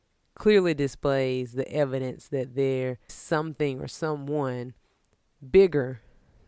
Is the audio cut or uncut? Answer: cut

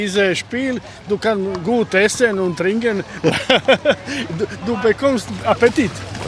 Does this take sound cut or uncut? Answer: uncut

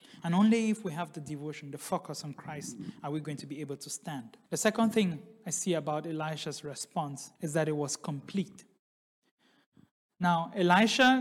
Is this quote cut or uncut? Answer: cut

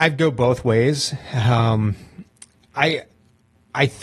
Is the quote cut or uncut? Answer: uncut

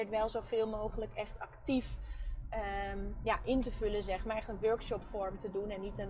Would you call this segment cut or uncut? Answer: uncut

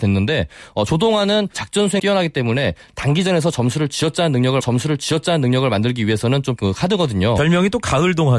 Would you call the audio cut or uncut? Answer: cut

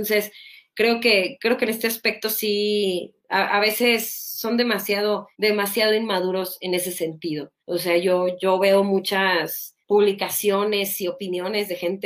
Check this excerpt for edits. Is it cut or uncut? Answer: cut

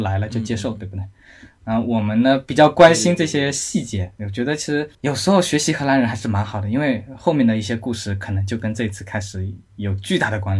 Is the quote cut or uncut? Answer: cut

